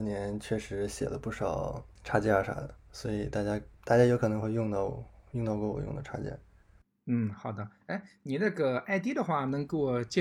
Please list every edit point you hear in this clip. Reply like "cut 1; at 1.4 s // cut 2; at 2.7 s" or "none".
cut 1; at 2.8 s